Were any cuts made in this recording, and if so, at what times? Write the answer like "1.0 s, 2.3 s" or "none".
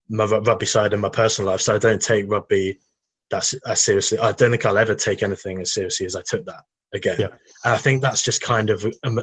none